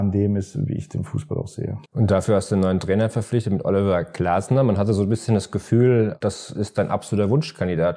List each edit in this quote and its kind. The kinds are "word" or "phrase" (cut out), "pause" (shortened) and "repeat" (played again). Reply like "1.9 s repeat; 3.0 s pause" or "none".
1.9 s pause